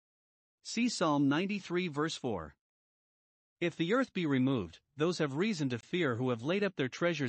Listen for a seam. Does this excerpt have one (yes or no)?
no